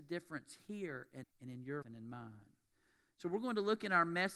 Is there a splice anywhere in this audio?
yes; 2 cuts; at 1.2 s, 1.8 s

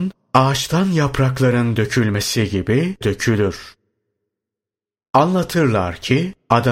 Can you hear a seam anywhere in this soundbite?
yes; 1 cut; at 3.0 s

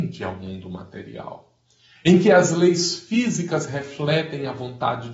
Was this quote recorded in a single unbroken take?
yes; 0 cuts

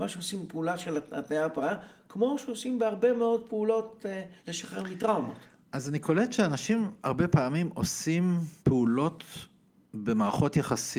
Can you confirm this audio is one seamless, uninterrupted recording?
no; 3 cuts; at 4.4 s, 5.5 s, 8.6 s

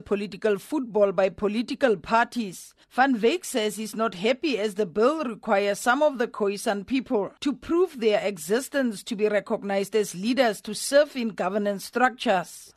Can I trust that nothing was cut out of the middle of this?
no; 1 cut; at 7.4 s

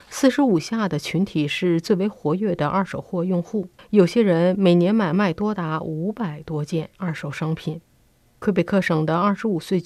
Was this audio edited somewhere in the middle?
yes; 2 cuts; at 3.8 s, 7.9 s

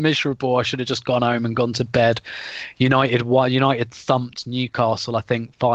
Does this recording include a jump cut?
no; 0 cuts

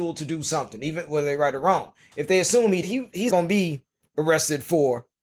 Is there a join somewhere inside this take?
yes; 2 cuts; at 2.8 s, 3.3 s

